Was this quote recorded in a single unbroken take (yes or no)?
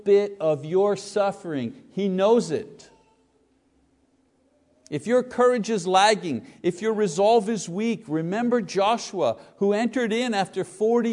yes